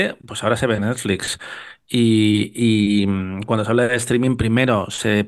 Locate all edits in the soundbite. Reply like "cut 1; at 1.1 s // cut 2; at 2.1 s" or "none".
none